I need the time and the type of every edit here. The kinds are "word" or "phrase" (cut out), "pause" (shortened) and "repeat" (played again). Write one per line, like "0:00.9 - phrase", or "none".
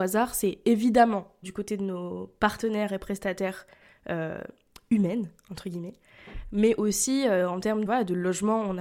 0:01.4 - word
0:07.9 - word